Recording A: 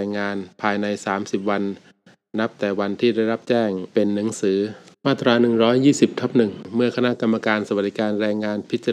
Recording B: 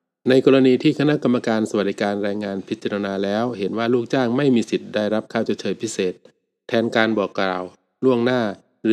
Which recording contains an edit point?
A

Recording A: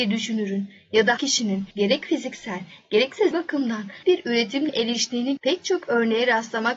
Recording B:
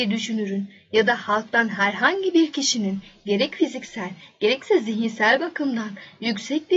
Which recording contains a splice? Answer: A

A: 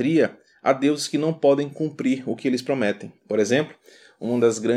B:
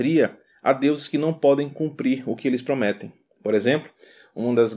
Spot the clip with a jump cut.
A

